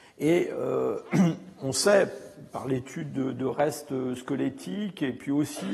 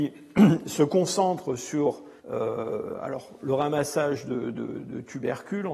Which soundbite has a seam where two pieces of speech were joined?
second; 1 cut; at 2.2 s

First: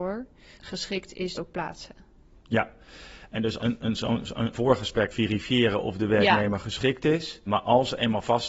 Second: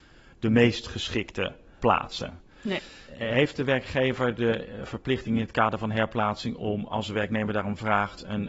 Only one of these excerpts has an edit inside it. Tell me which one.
first; 4 cuts; at 1.4 s, 3.6 s, 4.5 s, 5.1 s

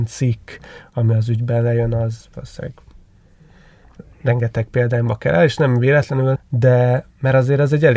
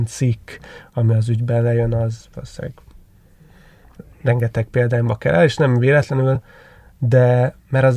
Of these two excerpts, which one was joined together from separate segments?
first; 1 cut; at 6.4 s

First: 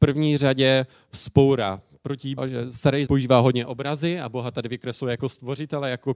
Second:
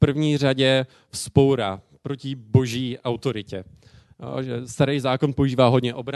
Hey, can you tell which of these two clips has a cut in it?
first; 2 cuts; at 2.4 s, 3.1 s

